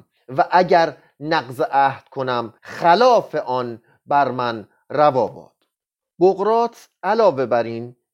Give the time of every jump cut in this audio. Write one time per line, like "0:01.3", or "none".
0:02.6
0:05.7